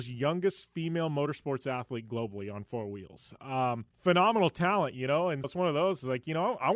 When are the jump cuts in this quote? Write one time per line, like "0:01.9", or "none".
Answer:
0:03.9
0:05.4